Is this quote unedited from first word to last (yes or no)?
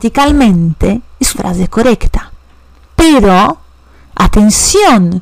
no